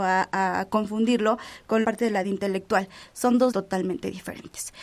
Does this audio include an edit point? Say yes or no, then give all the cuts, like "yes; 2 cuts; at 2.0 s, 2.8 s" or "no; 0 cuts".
yes; 3 cuts; at 1.8 s, 2.2 s, 3.5 s